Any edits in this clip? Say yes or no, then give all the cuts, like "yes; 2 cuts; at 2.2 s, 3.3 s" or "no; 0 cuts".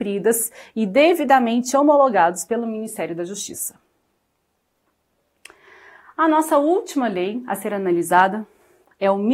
no; 0 cuts